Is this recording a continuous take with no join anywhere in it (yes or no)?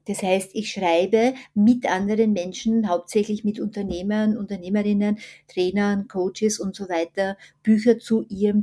yes